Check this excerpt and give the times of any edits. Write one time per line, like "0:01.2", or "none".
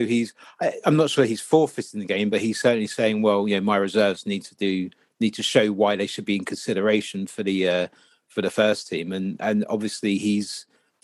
none